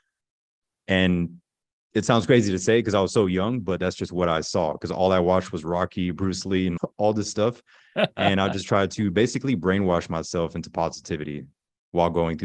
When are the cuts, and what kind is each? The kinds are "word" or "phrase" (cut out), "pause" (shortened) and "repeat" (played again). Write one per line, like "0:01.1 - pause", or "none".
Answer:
none